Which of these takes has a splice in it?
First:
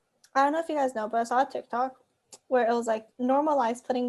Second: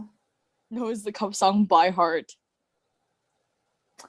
first; 1 cut; at 3.1 s

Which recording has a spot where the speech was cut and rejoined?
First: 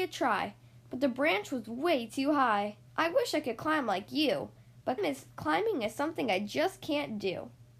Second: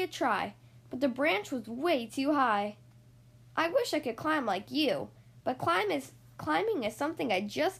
first; 3 cuts; at 2.9 s, 5.0 s, 5.3 s

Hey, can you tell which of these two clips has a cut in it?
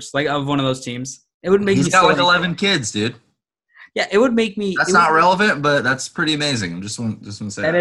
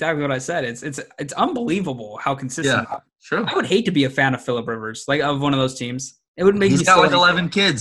second; 1 cut; at 3.1 s

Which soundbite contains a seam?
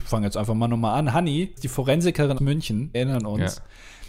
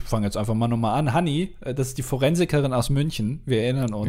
first; 3 cuts; at 1.6 s, 2.4 s, 2.9 s

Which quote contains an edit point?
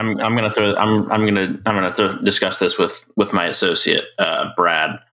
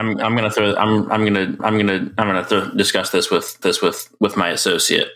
second; 2 cuts; at 1.6 s, 3.6 s

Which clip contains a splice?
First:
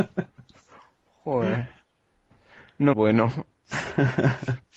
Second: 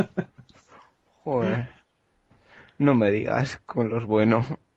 first; 1 cut; at 2.9 s

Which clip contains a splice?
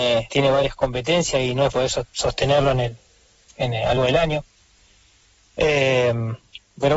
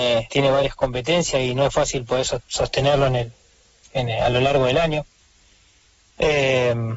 first; 2 cuts; at 1.7 s, 4.0 s

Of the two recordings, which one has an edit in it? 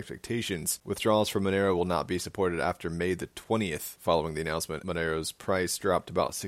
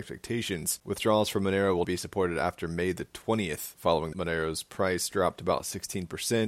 second; 2 cuts; at 1.8 s, 4.1 s

